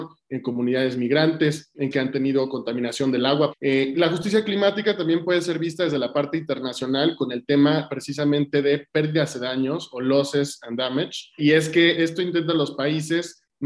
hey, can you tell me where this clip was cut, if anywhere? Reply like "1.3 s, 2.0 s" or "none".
1.9 s